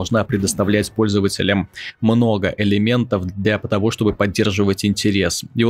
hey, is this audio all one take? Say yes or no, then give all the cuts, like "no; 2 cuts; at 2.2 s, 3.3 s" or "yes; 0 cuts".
yes; 0 cuts